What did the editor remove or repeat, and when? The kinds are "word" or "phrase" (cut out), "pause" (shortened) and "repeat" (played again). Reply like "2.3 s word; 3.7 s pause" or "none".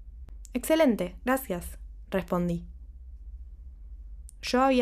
none